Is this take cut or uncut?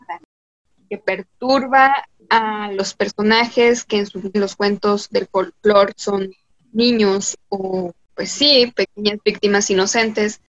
cut